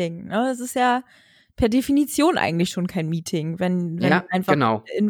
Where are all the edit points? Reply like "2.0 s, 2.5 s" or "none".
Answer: none